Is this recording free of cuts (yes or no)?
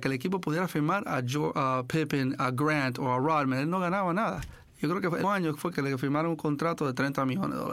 no